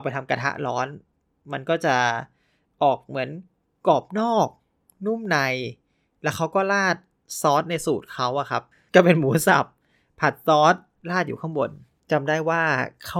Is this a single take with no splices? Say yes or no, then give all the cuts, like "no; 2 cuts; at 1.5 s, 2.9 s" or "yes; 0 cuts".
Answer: yes; 0 cuts